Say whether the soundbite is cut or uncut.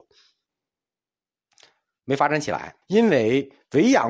cut